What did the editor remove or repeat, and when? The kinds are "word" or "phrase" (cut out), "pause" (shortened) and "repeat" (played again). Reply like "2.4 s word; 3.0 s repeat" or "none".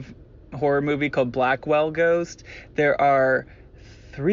none